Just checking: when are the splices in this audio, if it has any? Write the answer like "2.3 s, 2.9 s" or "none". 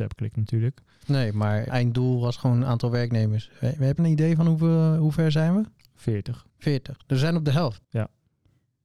1.7 s, 4.0 s, 6.5 s, 7.8 s